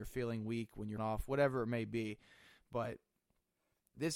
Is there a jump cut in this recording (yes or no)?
yes